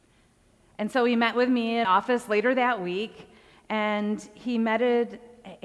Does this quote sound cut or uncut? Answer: cut